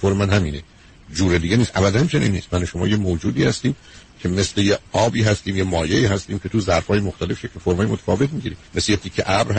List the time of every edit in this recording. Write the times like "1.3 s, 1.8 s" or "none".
4.9 s, 8.7 s